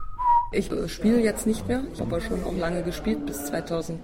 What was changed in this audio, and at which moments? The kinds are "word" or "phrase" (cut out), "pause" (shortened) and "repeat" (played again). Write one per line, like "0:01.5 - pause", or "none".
0:02.0 - word

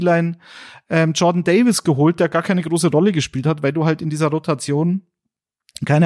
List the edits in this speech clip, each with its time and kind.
none

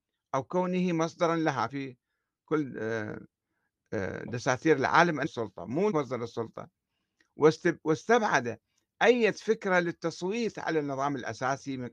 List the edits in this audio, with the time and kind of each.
0:01.7 - word
0:05.2 - phrase
0:05.9 - word

